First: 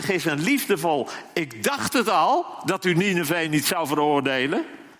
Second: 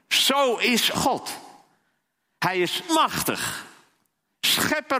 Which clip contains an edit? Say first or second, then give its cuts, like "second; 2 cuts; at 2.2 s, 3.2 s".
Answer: second; 2 cuts; at 0.9 s, 2.9 s